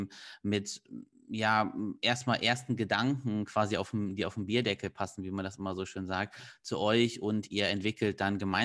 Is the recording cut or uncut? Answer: uncut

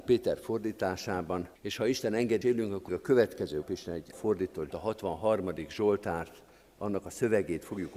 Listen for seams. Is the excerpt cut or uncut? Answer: cut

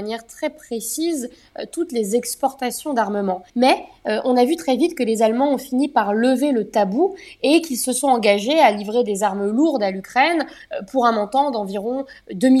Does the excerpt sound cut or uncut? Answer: cut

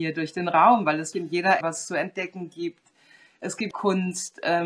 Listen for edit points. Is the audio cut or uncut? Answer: cut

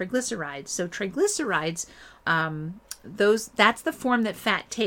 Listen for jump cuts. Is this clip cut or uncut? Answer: cut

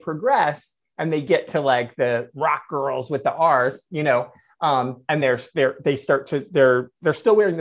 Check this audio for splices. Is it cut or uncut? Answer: uncut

